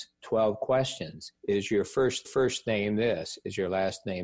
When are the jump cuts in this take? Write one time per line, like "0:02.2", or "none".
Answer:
0:01.4
0:02.2